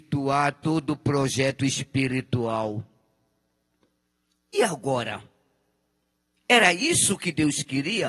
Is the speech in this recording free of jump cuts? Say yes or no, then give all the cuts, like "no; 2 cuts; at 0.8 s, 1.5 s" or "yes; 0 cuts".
yes; 0 cuts